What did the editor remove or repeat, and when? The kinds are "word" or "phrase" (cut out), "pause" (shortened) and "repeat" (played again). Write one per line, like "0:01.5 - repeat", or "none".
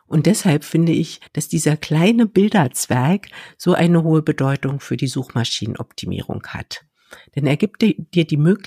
0:01.3 - pause

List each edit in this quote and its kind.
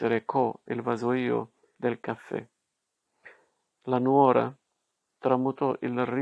none

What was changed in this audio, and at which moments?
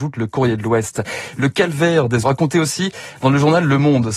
0:02.2 - word

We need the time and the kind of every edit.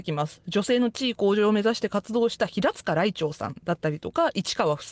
none

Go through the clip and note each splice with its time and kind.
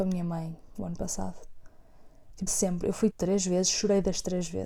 0:02.5 - word
0:03.1 - word

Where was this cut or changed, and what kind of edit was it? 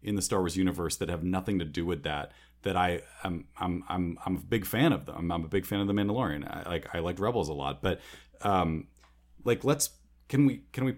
none

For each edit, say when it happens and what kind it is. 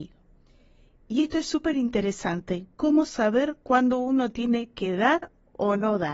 none

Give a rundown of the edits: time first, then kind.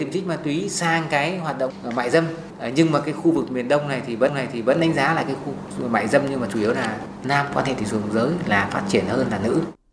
0:04.3 - repeat

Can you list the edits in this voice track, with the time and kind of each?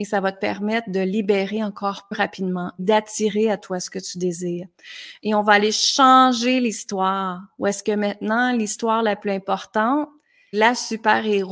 0:02.1 - word
0:02.8 - word
0:10.5 - word

